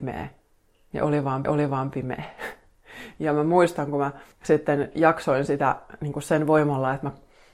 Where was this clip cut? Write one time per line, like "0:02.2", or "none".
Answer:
0:01.4
0:04.3